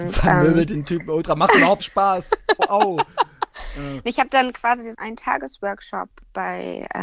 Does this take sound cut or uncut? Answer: cut